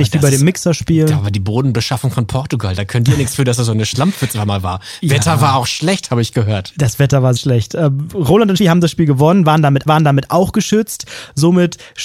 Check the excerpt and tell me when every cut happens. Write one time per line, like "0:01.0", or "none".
0:07.4
0:08.6
0:09.9